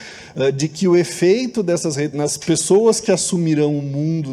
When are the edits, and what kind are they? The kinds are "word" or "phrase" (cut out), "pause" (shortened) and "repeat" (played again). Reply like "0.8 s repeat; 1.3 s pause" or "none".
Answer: 2.1 s word